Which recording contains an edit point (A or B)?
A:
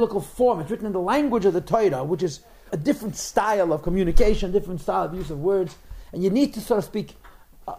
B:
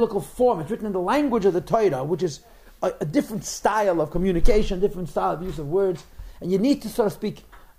A